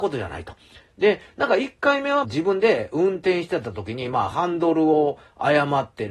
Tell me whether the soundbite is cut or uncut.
cut